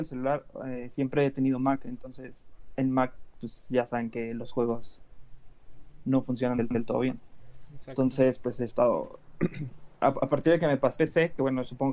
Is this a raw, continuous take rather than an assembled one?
no; 2 cuts; at 6.7 s, 11.0 s

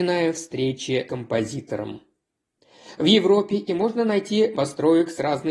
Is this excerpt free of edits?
no; 3 cuts; at 1.1 s, 3.7 s, 4.5 s

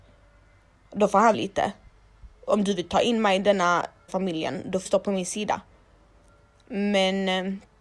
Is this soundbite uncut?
no; 3 cuts; at 1.3 s, 4.1 s, 4.9 s

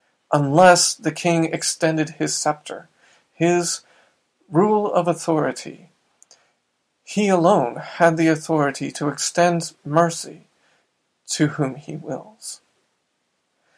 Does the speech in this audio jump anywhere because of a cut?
no; 0 cuts

